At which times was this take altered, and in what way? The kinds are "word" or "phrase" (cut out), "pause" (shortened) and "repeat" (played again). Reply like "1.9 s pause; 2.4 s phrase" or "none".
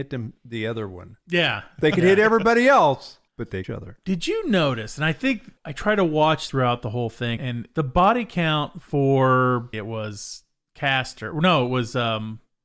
3.3 s pause; 3.6 s phrase; 5.6 s pause; 6.5 s word; 7.4 s word; 9.7 s word